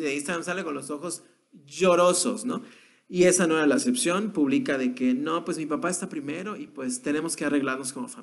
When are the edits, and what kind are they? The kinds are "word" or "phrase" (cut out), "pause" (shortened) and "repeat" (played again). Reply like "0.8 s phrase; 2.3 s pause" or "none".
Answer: none